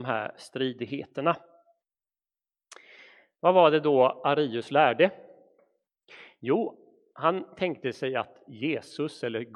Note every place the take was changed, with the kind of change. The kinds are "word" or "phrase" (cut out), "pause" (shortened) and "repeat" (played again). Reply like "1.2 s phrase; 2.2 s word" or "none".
none